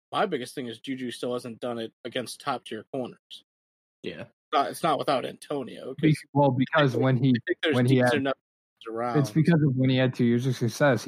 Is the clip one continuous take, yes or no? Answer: yes